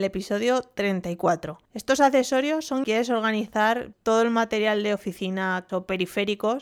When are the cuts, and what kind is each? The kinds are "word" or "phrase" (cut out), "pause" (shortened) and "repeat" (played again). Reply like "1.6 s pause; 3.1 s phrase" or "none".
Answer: 1.7 s pause; 2.8 s phrase; 3.9 s word; 5.7 s word